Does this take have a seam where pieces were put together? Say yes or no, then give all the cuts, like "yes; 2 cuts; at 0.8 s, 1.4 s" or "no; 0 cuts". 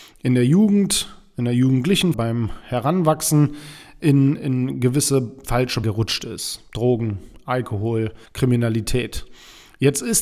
yes; 4 cuts; at 2.1 s, 4.4 s, 5.8 s, 8.3 s